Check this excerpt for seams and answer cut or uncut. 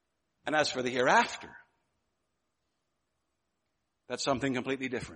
uncut